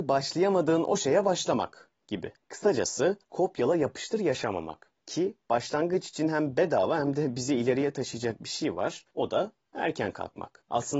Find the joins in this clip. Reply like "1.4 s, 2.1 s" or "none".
2.0 s, 5.0 s, 9.1 s